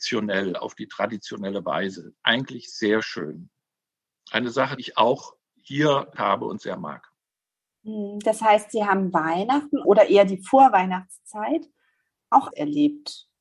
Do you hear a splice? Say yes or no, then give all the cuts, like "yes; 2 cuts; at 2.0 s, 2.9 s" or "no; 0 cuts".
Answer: yes; 4 cuts; at 4.8 s, 6.2 s, 9.8 s, 12.5 s